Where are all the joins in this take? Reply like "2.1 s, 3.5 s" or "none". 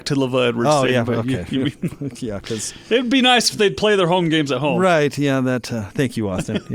none